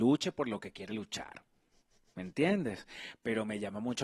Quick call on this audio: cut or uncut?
uncut